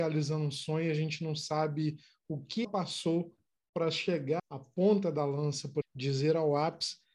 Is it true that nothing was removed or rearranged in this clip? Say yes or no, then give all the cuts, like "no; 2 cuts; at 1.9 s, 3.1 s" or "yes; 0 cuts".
no; 3 cuts; at 2.6 s, 4.4 s, 5.8 s